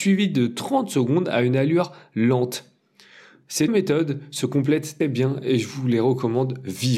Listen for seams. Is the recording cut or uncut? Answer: cut